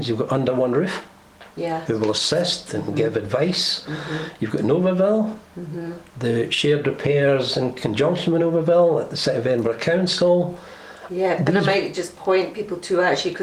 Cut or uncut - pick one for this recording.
uncut